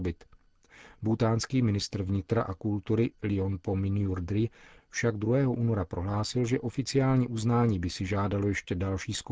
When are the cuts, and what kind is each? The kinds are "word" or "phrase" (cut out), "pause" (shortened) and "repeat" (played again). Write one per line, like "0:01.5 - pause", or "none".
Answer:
none